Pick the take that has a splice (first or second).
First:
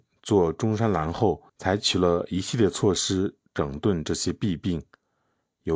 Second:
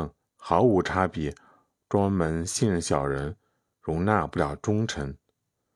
first